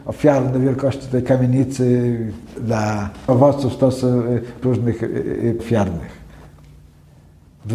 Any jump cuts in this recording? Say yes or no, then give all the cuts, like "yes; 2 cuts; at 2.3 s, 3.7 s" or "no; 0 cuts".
yes; 4 cuts; at 2.6 s, 3.3 s, 4.6 s, 5.6 s